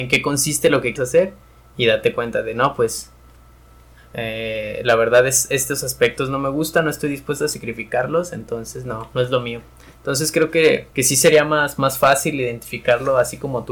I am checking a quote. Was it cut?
yes; 2 cuts; at 1.0 s, 10.9 s

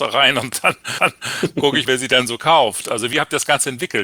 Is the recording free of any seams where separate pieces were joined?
no; 2 cuts; at 1.0 s, 1.9 s

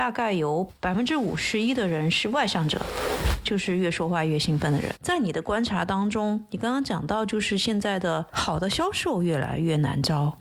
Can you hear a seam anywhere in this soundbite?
no; 0 cuts

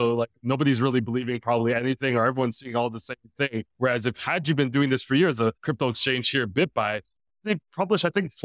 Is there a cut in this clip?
no; 0 cuts

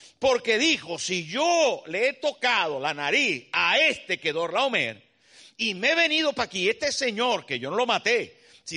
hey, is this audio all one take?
yes; 0 cuts

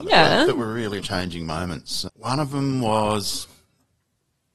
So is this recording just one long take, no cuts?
no; 1 cut; at 1.0 s

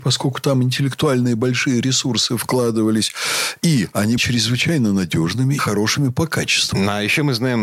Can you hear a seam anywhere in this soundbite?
yes; 2 cuts; at 4.2 s, 5.6 s

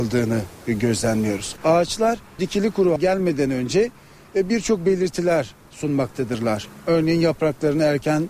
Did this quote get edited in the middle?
yes; 2 cuts; at 2.4 s, 3.0 s

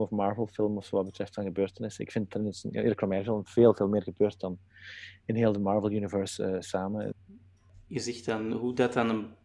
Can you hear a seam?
no; 0 cuts

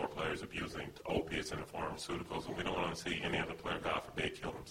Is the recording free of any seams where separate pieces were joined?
no; 1 cut; at 1.0 s

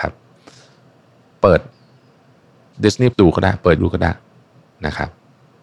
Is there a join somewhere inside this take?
yes; 3 cuts; at 2.7 s, 3.1 s, 3.8 s

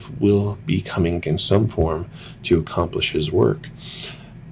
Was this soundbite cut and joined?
yes; 1 cut; at 1.2 s

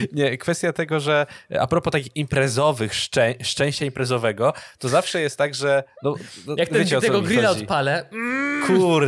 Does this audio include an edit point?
no; 0 cuts

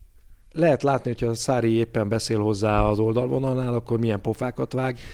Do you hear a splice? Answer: no; 0 cuts

